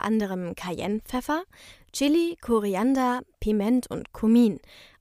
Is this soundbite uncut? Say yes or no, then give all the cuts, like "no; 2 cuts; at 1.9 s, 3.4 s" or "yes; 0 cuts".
yes; 0 cuts